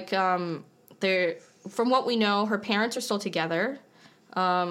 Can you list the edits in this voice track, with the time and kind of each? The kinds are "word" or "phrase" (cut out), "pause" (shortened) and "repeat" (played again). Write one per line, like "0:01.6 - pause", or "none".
none